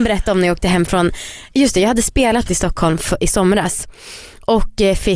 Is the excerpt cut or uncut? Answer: cut